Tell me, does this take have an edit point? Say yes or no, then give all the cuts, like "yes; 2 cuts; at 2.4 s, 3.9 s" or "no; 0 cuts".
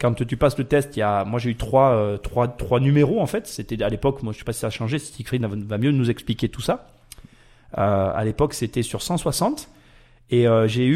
no; 0 cuts